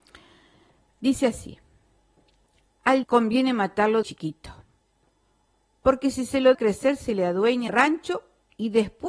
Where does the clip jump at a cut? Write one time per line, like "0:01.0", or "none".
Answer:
0:03.0
0:04.0
0:06.5
0:07.7